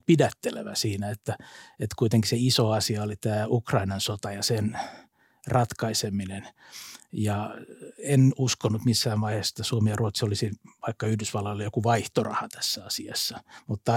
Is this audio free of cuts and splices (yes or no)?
yes